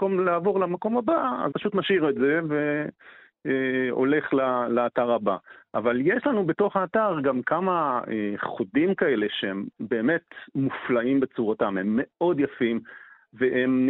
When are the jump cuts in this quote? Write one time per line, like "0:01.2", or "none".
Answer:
0:01.5